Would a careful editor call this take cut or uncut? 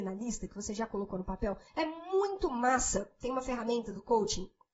cut